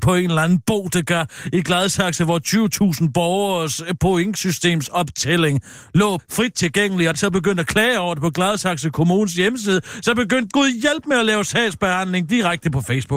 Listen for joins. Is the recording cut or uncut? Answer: cut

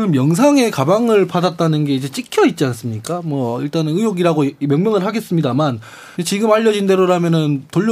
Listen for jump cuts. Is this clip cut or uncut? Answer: cut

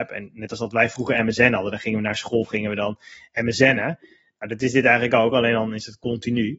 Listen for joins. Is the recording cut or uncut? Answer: uncut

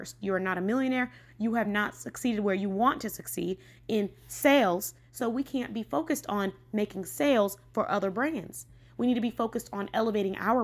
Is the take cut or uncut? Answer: uncut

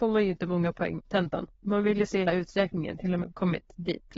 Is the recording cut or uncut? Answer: cut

